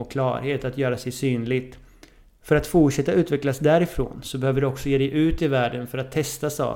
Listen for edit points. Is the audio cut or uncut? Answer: uncut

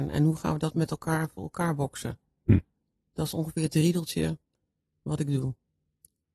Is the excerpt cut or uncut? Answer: uncut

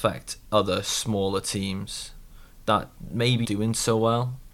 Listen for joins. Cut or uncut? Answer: cut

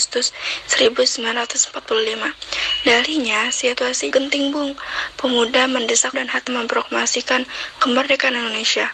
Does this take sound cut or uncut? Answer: cut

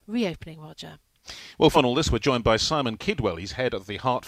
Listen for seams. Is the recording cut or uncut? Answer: cut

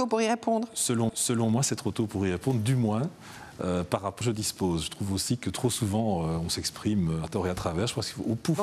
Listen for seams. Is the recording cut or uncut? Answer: cut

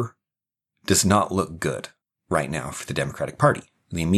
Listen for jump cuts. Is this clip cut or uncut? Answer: cut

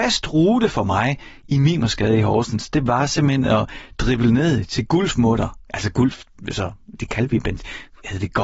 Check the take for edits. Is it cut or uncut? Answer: cut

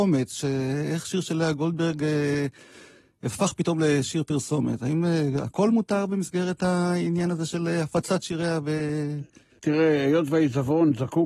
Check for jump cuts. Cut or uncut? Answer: uncut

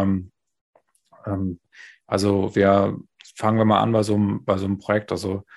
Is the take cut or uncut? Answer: uncut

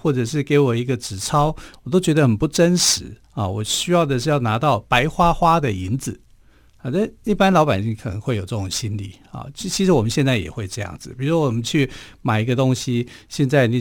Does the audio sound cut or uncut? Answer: cut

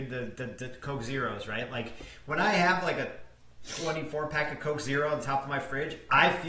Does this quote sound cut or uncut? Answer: uncut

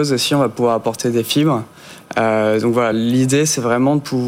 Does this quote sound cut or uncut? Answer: uncut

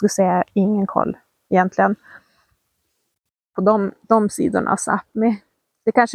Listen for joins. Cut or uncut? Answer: uncut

